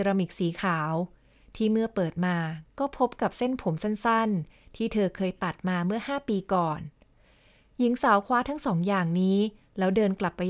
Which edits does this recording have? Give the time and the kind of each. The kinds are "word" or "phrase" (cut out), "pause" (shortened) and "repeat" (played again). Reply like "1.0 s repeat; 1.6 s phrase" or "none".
none